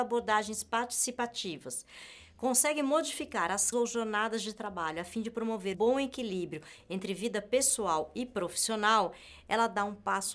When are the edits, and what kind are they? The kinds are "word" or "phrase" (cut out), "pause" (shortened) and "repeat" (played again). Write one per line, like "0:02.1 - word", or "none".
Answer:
0:03.7 - word
0:05.7 - word